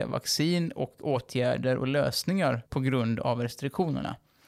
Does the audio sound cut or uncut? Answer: cut